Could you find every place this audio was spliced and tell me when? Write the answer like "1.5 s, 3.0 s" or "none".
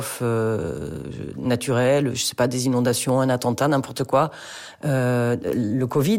none

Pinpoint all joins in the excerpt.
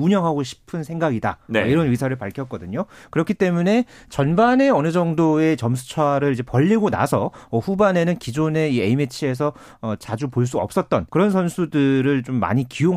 11.1 s

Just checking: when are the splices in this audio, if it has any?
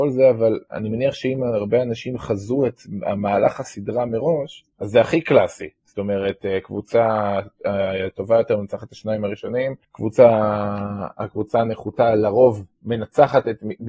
4.7 s, 9.8 s

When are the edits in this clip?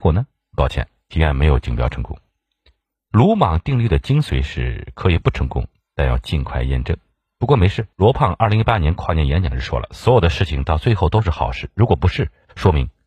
7.9 s

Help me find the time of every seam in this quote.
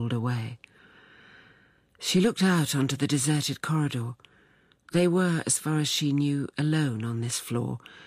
none

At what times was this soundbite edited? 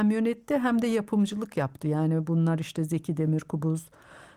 none

